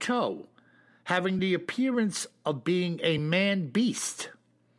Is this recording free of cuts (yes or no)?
yes